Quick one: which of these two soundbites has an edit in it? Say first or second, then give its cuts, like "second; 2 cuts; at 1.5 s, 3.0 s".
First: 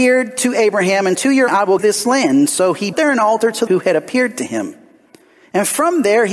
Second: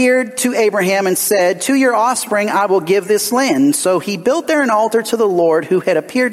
first; 5 cuts; at 1.1 s, 1.5 s, 1.8 s, 2.9 s, 3.7 s